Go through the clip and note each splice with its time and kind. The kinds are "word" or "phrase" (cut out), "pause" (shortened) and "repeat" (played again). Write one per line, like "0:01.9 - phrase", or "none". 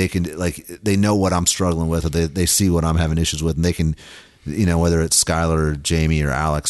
none